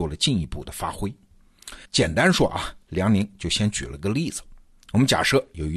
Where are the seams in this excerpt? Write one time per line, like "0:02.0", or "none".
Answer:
0:01.8